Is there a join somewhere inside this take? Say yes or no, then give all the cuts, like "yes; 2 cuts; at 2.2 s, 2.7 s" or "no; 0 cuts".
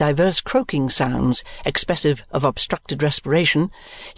no; 0 cuts